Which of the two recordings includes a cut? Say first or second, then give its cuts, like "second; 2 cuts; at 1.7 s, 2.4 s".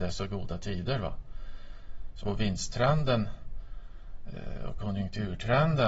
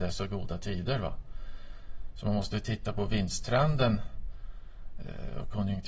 first; 1 cut; at 2.2 s